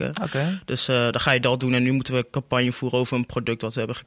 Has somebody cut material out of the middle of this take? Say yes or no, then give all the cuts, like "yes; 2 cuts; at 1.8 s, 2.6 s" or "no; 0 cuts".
no; 0 cuts